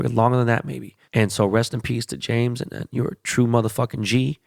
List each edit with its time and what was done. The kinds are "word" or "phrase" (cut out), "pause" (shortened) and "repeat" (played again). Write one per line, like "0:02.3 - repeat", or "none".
0:01.0 - pause